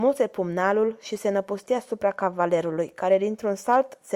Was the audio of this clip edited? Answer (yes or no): no